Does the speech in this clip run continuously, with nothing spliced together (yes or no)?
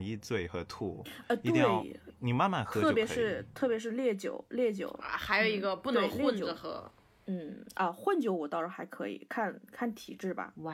yes